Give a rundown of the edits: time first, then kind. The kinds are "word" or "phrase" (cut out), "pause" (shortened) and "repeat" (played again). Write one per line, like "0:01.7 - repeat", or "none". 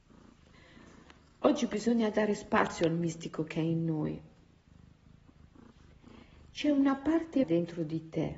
0:07.4 - word